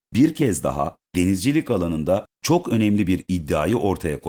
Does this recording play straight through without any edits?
no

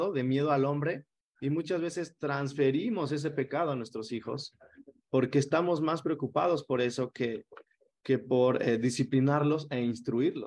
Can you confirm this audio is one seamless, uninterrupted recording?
yes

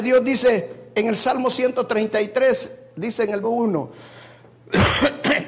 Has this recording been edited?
yes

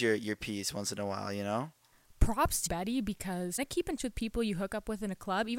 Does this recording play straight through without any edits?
no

